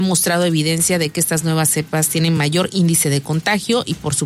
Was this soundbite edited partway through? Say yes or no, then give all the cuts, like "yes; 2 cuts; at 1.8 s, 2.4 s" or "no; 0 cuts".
no; 0 cuts